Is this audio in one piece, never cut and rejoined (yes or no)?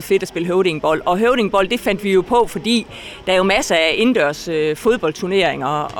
yes